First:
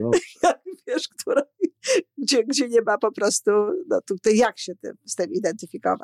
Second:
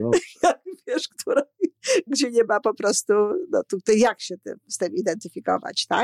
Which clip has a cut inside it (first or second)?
second